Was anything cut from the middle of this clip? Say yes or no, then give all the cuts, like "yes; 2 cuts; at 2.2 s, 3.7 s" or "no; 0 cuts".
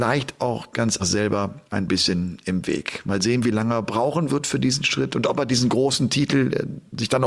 yes; 2 cuts; at 1.0 s, 1.7 s